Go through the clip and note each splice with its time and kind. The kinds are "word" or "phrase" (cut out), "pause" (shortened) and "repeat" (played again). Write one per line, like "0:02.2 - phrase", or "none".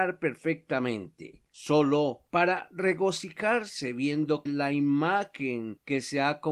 0:04.5 - word